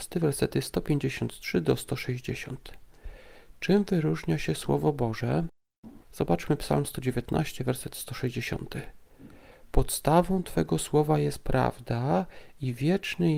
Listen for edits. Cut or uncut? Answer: cut